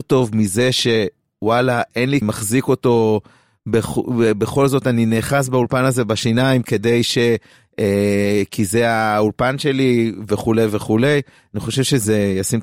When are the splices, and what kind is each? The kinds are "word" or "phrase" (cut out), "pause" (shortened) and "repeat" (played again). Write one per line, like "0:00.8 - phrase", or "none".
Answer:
0:02.2 - phrase